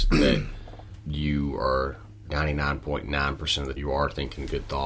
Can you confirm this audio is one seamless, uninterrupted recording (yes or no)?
no